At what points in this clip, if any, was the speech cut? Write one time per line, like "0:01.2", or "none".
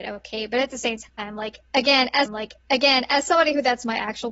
0:01.1
0:02.3